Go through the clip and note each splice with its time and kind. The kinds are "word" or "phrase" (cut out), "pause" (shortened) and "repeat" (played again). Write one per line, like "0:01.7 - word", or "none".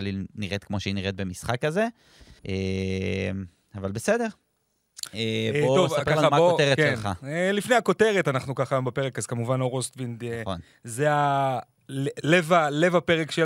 0:02.4 - pause